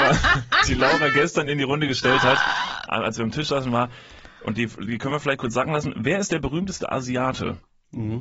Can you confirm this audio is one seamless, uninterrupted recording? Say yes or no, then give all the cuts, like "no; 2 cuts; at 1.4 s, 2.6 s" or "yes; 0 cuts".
yes; 0 cuts